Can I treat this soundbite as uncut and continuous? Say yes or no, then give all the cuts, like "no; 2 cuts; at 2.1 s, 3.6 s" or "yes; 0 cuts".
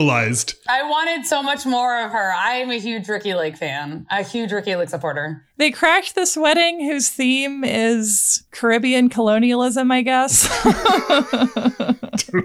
no; 1 cut; at 8.5 s